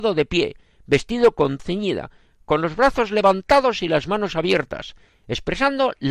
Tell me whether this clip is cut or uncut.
cut